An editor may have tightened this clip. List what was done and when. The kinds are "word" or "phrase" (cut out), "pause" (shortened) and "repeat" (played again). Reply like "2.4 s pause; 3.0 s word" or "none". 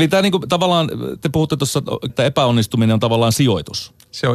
1.2 s word; 2.1 s word